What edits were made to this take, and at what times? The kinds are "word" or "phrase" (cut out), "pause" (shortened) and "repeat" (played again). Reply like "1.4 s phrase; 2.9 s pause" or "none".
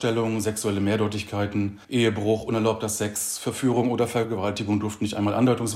1.8 s pause

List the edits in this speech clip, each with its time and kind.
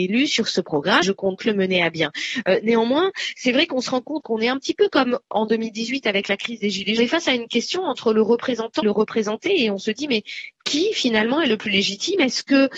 1.0 s word; 1.4 s word; 4.2 s phrase; 7.0 s phrase; 8.8 s word

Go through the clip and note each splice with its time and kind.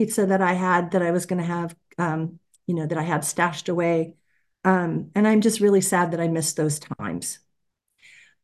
none

